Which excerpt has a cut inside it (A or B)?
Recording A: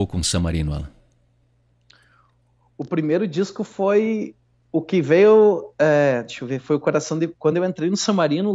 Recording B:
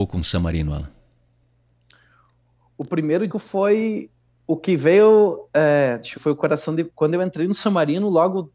B